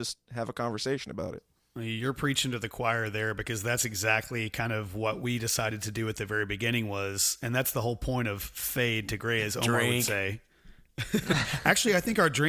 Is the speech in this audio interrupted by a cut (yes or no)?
no